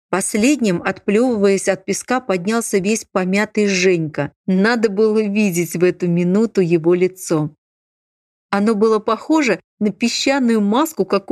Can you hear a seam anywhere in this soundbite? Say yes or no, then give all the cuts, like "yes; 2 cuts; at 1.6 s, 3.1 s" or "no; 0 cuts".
yes; 1 cut; at 4.4 s